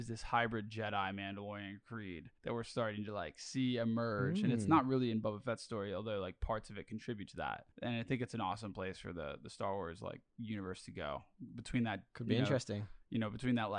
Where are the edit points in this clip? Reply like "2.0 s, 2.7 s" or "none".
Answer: 2.4 s, 7.7 s, 10.3 s